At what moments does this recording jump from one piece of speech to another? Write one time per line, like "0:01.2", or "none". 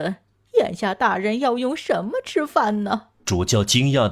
0:03.1

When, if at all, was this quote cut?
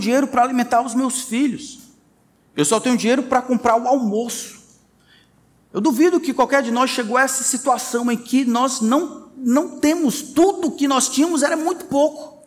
none

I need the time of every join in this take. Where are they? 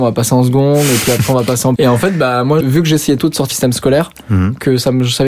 0:01.8
0:02.6
0:03.2
0:03.5

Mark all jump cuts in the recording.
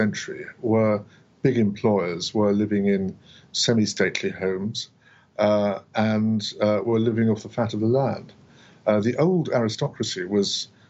none

